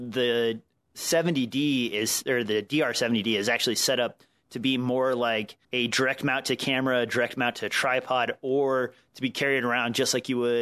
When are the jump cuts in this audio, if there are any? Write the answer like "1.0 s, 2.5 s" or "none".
5.6 s